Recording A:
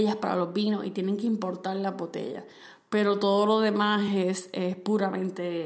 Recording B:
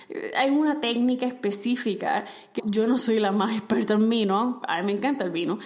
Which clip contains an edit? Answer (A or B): B